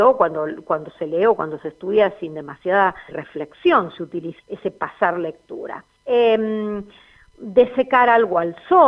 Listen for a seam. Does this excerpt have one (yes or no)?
yes